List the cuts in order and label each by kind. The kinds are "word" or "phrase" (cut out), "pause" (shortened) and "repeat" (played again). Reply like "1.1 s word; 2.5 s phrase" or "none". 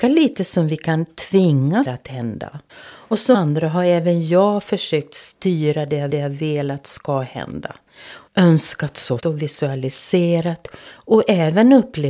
1.8 s word; 2.7 s pause; 3.3 s word; 6.1 s repeat; 8.3 s pause; 9.2 s word